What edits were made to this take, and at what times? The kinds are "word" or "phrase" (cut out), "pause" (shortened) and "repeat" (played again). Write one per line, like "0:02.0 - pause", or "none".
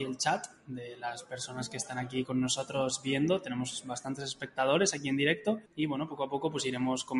0:05.6 - pause